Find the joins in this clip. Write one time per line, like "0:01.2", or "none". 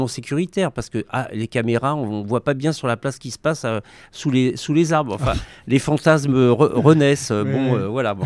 none